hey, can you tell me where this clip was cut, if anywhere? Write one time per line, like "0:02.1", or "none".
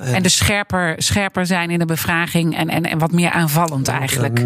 none